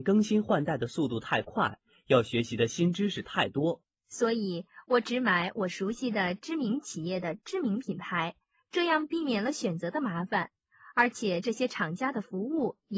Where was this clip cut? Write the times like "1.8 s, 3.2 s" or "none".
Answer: 3.9 s